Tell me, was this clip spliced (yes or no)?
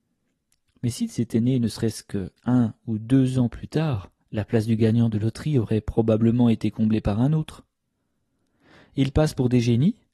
yes